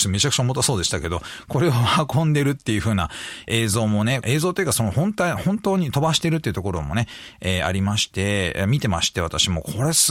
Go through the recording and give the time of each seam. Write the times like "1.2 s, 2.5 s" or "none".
4.2 s